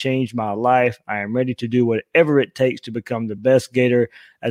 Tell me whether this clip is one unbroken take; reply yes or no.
yes